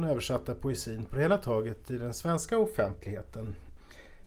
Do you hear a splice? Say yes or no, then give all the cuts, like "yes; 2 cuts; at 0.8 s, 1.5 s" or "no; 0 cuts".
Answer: no; 0 cuts